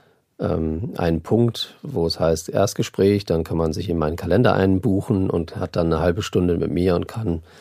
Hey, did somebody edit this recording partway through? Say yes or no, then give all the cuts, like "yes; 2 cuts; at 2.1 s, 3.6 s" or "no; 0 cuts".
no; 0 cuts